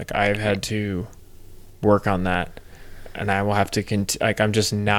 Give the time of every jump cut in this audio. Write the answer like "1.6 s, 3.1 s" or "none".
none